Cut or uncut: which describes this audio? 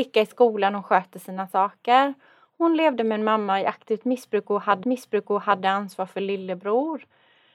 cut